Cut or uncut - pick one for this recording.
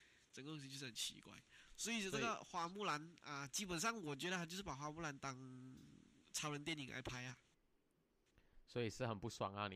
uncut